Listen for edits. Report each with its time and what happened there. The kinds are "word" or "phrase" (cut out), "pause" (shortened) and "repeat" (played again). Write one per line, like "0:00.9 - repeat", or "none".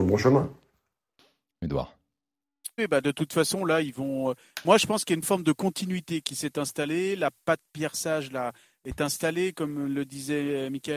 0:02.8 - word

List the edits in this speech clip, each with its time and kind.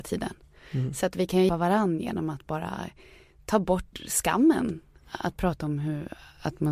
0:01.5 - word

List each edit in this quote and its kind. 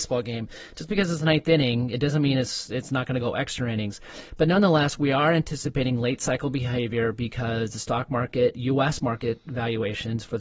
none

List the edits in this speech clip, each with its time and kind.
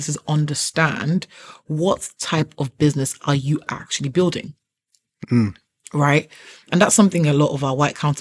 none

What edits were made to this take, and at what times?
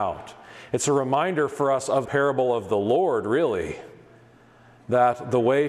0:02.1 - word

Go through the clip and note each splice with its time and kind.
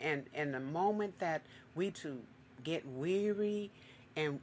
0:01.9 - word

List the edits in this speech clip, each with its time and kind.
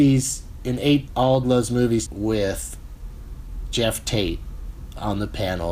0:01.1 - word
0:01.4 - word
0:02.1 - word

